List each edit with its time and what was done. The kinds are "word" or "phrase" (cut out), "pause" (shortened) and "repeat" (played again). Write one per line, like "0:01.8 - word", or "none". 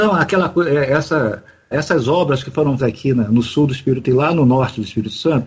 0:01.7 - word
0:02.8 - word
0:04.0 - word

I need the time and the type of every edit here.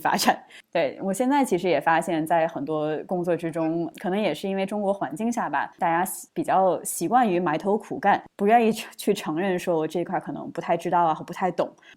0:05.7 - pause

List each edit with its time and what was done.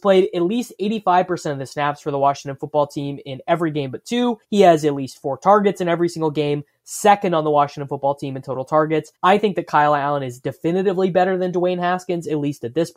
0:04.4 - pause
0:09.1 - pause

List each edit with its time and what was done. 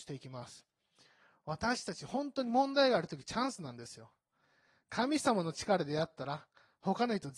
none

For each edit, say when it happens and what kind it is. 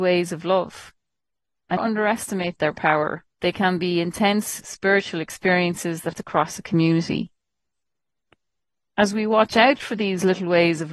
0:01.8 - phrase
0:03.3 - pause
0:06.1 - phrase

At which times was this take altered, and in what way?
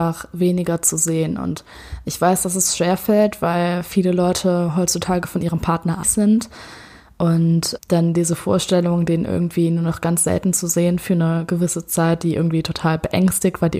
0:06.0 - word
0:07.8 - word

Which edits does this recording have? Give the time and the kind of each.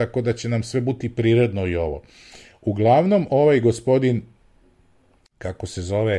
none

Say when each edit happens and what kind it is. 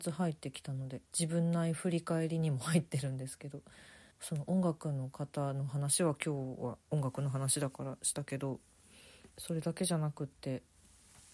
0:01.1 - pause
0:04.1 - pause
0:09.3 - pause

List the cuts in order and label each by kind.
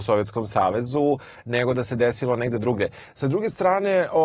none

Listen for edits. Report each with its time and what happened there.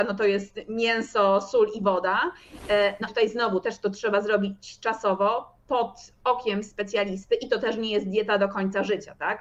0:03.1 - word

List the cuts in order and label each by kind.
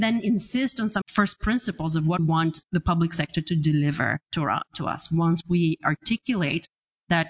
0:01.0 - word
0:02.2 - word
0:02.7 - word

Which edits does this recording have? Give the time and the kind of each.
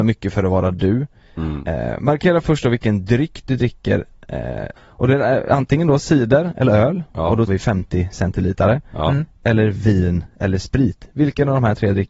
0:04.8 - phrase
0:07.5 - word

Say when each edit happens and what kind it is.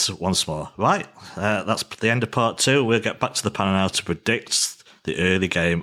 none

